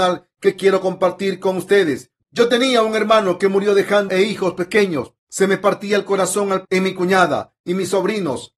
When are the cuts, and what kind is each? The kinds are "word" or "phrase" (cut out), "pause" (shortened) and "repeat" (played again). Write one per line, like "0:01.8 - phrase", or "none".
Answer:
0:02.2 - pause
0:04.1 - word
0:05.2 - pause
0:06.6 - word